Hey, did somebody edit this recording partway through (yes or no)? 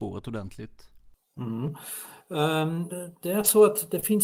yes